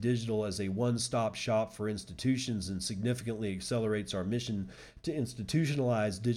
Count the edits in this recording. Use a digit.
0